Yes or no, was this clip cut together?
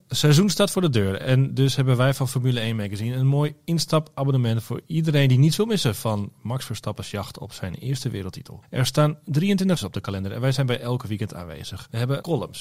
yes